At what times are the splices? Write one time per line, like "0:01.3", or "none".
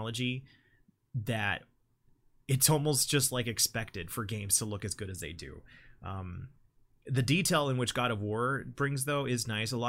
none